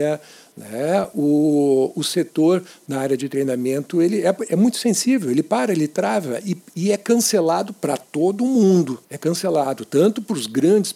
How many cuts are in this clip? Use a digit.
1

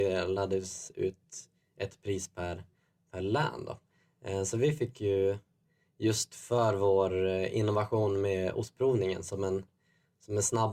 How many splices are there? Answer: 0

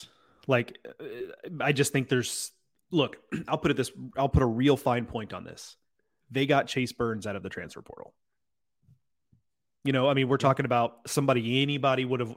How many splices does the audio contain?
0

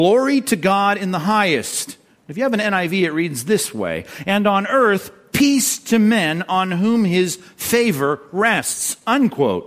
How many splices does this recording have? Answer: 0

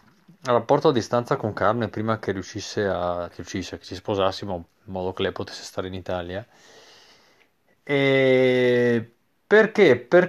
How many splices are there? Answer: 3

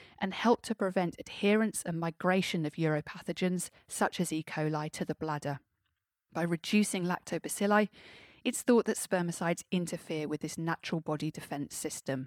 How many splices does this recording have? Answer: 0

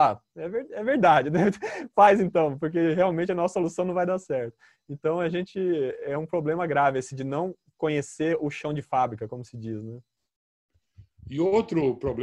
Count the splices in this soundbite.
0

